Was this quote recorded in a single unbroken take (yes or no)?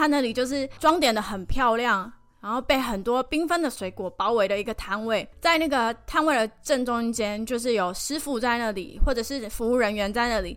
no